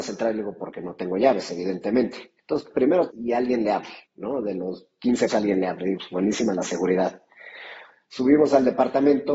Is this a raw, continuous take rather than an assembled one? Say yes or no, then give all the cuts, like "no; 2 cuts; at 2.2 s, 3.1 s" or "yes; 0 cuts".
no; 5 cuts; at 2.4 s, 3.1 s, 4.1 s, 5.3 s, 6.0 s